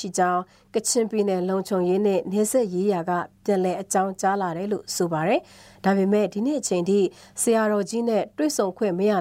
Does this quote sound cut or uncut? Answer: uncut